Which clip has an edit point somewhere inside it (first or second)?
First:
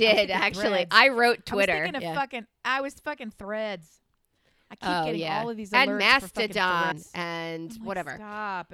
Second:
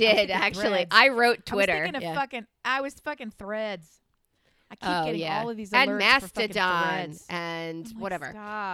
first